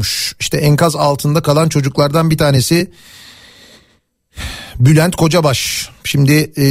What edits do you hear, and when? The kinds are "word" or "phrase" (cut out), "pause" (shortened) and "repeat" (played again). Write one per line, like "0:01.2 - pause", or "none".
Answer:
none